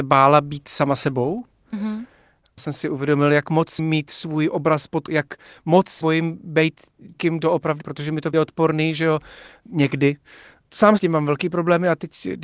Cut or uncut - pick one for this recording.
cut